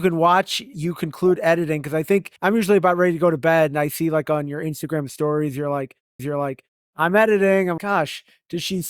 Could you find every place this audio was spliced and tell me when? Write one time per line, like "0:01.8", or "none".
0:02.4
0:06.2
0:07.8